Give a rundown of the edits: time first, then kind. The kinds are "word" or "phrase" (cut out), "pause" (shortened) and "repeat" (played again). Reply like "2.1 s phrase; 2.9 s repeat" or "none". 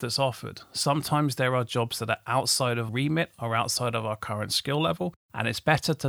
2.9 s word